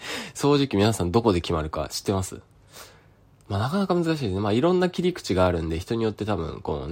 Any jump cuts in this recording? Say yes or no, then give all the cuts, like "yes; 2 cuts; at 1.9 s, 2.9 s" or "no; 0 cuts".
no; 0 cuts